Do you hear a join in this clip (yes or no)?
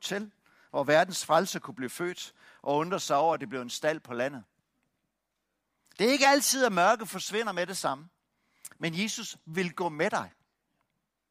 no